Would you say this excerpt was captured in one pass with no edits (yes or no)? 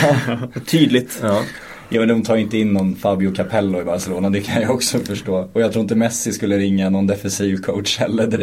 yes